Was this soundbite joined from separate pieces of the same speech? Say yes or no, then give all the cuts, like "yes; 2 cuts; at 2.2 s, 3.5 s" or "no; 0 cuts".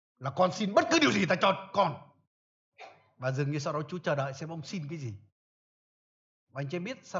no; 0 cuts